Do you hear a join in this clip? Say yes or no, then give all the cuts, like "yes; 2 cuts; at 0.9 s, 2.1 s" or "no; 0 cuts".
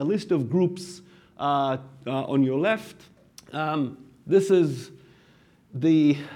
yes; 1 cut; at 3.3 s